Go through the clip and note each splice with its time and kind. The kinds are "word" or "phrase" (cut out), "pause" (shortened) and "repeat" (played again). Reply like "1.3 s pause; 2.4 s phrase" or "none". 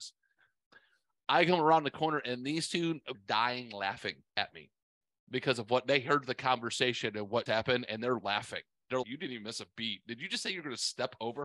3.1 s phrase; 4.3 s pause; 7.5 s word; 9.0 s word